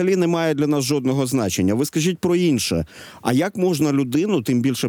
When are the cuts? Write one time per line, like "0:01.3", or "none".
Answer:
none